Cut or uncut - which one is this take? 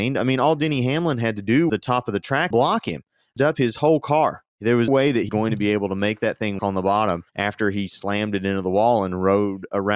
cut